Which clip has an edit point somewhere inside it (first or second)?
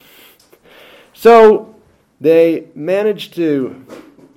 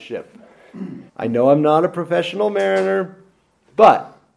second